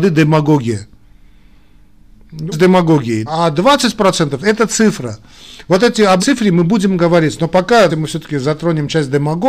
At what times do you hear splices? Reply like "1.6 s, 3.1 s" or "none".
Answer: 2.5 s, 3.3 s, 6.2 s, 7.9 s